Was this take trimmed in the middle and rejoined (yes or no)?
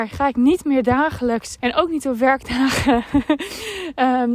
yes